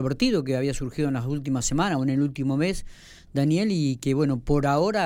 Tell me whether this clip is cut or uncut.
uncut